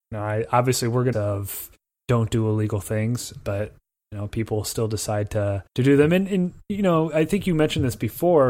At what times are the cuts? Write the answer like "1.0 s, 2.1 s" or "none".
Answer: 1.1 s, 5.7 s